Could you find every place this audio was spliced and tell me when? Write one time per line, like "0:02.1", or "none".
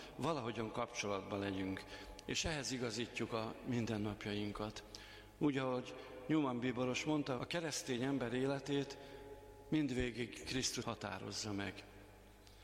0:07.4
0:10.8